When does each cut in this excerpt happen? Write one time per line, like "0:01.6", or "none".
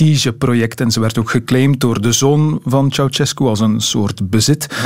none